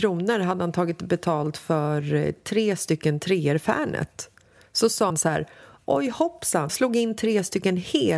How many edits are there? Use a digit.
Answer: 2